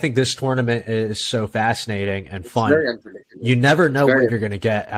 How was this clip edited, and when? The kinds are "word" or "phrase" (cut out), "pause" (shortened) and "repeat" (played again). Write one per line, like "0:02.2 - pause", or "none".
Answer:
none